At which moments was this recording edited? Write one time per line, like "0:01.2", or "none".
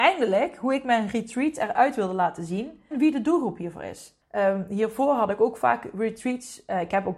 0:02.9
0:04.2